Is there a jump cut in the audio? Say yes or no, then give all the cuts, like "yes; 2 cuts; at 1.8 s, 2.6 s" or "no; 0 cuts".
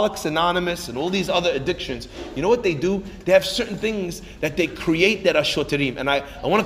no; 0 cuts